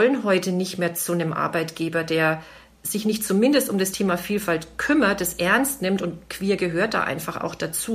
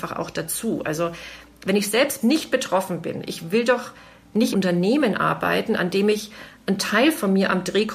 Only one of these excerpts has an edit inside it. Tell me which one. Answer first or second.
second